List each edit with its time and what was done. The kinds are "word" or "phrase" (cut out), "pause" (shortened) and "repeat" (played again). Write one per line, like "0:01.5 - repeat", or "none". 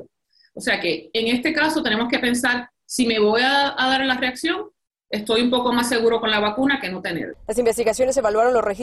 none

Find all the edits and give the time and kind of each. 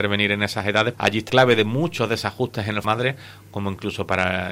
0:00.9 - word
0:01.3 - word
0:02.8 - phrase

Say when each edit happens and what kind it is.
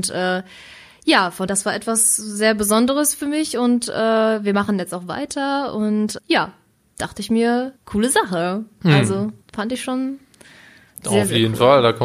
0:01.5 - word
0:06.2 - word
0:07.8 - pause
0:09.4 - pause

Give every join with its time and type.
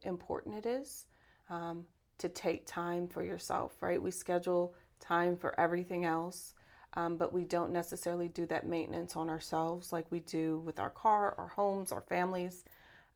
none

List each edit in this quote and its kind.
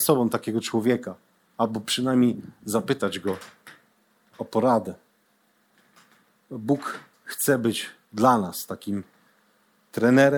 none

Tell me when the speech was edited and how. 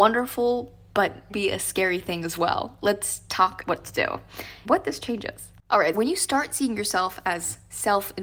0:01.3 - word
0:03.6 - word
0:04.6 - word
0:05.9 - word

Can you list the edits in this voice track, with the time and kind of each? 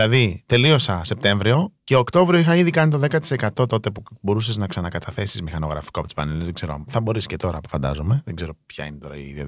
0:01.8 - pause

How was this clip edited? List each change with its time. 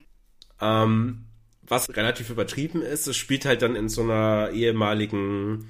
0:01.9 - word
0:03.8 - word

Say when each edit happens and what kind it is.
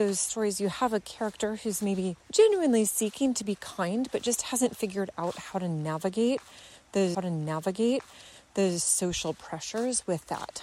0:02.2 - pause
0:07.1 - repeat

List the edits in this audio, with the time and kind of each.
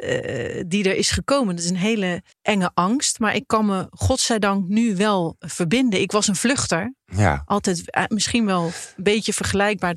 0:02.3 - pause

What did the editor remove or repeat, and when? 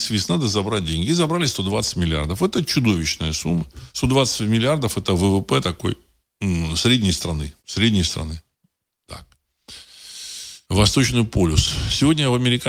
0:03.9 - pause
0:07.6 - pause
0:10.6 - pause

